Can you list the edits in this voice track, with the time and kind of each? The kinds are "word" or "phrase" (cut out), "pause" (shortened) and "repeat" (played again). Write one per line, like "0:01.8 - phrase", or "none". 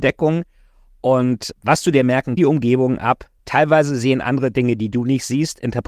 0:01.5 - word
0:02.4 - phrase
0:03.4 - pause